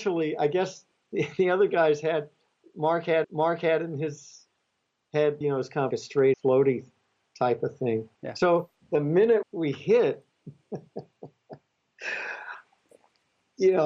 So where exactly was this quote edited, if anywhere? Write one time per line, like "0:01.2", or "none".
0:03.2
0:05.4
0:05.9
0:06.3
0:08.1
0:09.4
0:10.3